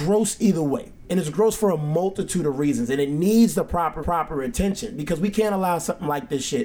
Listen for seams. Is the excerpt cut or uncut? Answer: cut